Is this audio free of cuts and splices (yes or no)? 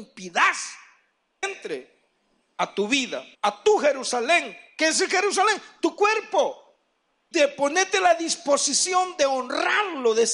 no